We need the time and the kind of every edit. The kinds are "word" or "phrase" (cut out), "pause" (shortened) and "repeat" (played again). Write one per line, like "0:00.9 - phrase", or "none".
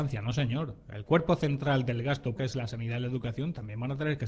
0:02.4 - word